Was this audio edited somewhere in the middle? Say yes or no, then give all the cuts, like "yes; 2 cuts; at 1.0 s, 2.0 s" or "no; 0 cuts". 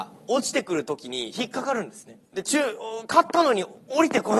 yes; 1 cut; at 2.2 s